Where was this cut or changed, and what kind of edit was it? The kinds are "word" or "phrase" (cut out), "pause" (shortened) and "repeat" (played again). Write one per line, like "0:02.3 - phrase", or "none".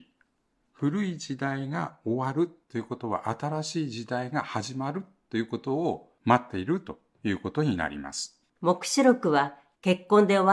0:02.6 - pause
0:08.5 - pause